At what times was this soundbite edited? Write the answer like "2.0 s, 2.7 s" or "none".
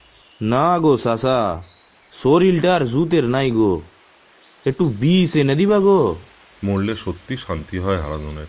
none